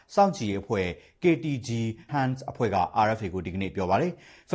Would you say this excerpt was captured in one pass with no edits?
no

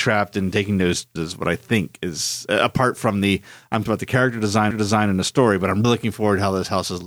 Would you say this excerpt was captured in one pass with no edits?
no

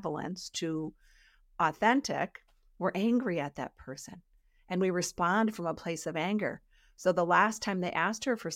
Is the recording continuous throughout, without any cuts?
yes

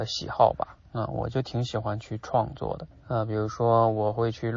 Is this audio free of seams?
no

